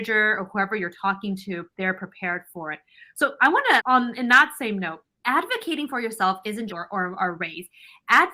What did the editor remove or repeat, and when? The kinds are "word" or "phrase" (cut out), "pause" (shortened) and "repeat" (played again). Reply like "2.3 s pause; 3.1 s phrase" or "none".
1.7 s pause; 3.8 s word; 5.1 s pause; 6.7 s phrase

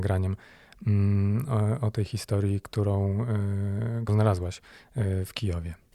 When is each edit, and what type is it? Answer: 4.1 s word

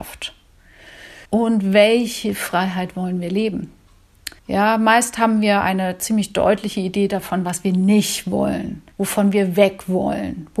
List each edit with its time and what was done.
1.3 s pause; 4.4 s pause; 8.9 s pause

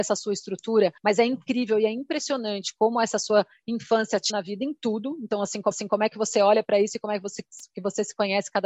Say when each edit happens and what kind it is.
1.0 s pause; 4.3 s word; 5.7 s repeat

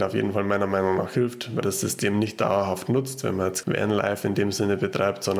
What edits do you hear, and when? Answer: 1.6 s word; 3.6 s word

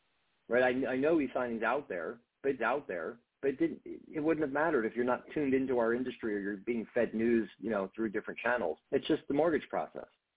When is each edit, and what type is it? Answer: 2.6 s repeat; 8.8 s pause

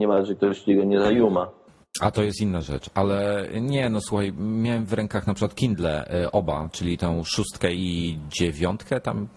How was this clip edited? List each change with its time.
1.7 s pause

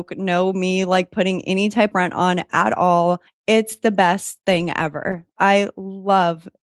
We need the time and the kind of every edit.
1.9 s word; 3.3 s pause

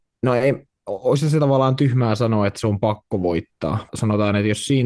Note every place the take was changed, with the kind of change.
3.9 s word

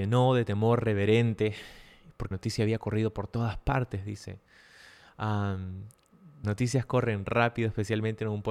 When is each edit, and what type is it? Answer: 2.3 s word; 6.4 s word

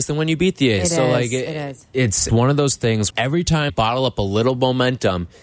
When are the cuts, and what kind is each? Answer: 2.3 s phrase; 3.1 s word; 3.7 s word

